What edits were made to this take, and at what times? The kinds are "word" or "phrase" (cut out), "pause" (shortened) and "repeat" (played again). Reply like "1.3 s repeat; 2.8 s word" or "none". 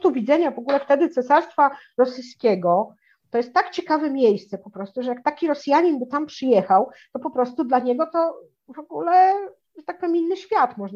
none